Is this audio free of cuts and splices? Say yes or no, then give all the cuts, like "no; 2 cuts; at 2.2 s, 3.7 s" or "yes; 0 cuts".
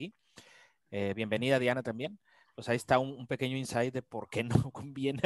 yes; 0 cuts